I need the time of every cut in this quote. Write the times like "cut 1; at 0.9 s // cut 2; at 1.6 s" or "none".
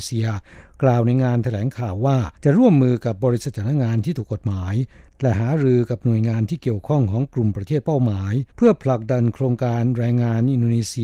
cut 1; at 2.3 s // cut 2; at 8.5 s